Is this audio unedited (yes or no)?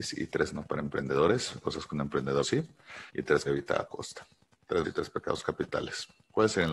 no